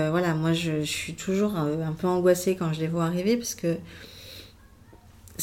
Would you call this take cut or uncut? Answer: uncut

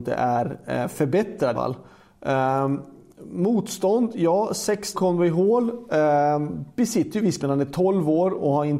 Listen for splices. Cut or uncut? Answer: cut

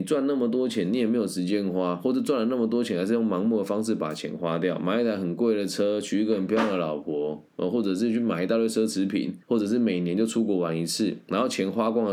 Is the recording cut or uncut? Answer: cut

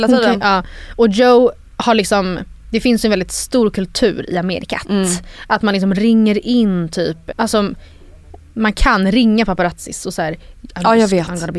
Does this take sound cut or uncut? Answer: cut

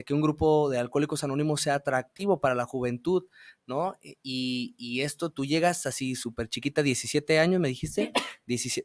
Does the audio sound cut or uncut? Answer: uncut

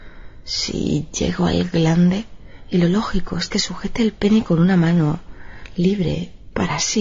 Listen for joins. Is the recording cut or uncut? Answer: uncut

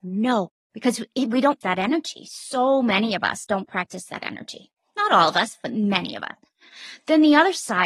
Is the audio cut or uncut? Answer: cut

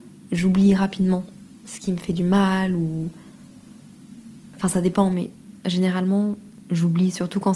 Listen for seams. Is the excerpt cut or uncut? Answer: uncut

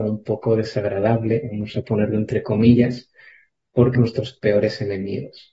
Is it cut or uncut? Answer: cut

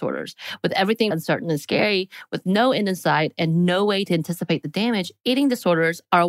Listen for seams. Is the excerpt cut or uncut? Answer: cut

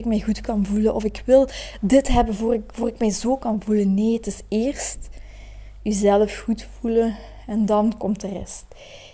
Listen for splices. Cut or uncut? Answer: uncut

